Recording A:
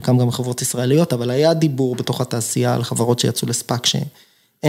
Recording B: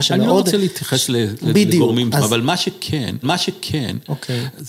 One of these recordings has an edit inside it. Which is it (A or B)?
B